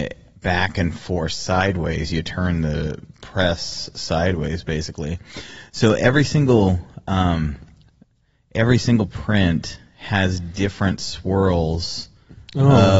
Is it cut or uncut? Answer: uncut